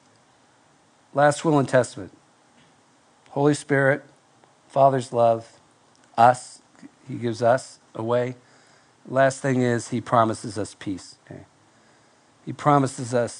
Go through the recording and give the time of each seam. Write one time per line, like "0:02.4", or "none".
0:11.2